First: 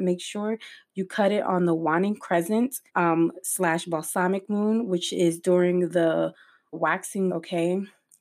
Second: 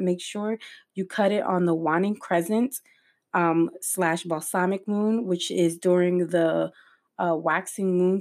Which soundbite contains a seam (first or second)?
first